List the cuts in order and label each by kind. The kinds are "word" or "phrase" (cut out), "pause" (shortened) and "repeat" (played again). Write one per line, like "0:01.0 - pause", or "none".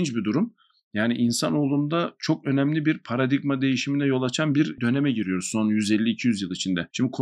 none